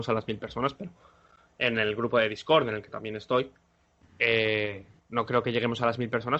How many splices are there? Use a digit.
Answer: 0